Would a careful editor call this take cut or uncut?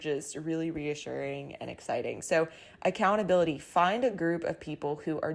uncut